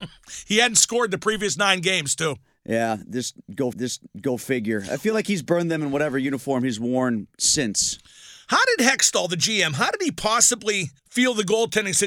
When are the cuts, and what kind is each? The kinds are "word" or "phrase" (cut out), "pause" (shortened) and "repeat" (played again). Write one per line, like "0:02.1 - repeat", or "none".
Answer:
0:03.7 - repeat
0:11.0 - pause